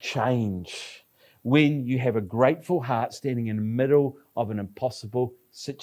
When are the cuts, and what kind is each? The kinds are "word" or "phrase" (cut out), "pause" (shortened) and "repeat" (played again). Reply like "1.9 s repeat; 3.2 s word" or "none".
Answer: none